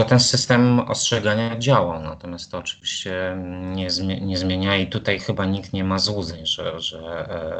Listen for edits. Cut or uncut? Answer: uncut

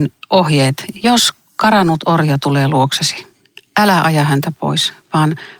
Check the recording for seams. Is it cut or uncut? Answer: uncut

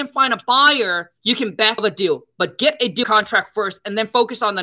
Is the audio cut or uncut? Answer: cut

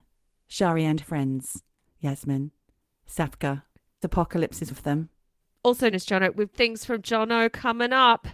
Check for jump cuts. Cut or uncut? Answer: cut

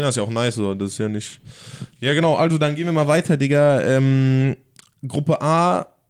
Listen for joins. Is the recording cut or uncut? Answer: uncut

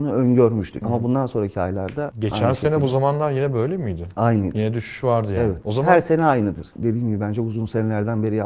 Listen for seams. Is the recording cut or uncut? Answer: uncut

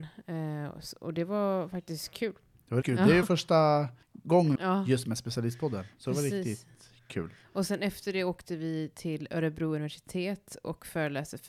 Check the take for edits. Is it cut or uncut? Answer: cut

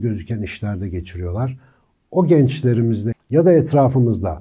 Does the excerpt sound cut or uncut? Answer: cut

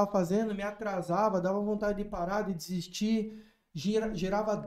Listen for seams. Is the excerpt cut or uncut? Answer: uncut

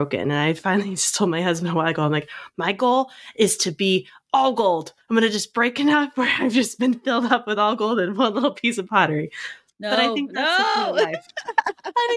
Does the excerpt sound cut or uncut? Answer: uncut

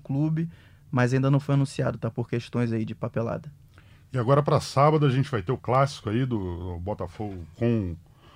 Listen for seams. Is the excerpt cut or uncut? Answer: uncut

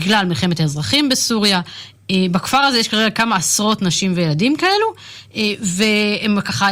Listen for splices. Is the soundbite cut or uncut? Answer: uncut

